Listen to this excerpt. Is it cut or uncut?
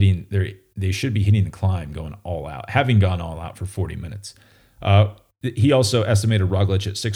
uncut